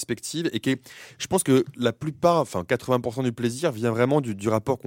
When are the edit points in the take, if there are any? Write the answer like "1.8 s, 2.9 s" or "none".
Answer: none